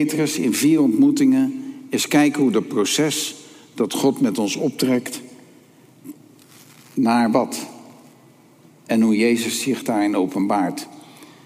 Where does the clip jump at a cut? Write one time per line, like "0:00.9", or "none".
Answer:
none